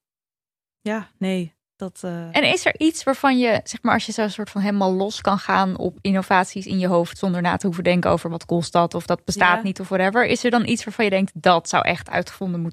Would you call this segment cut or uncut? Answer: uncut